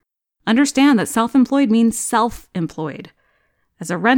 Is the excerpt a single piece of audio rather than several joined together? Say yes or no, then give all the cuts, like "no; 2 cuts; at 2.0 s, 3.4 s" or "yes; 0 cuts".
yes; 0 cuts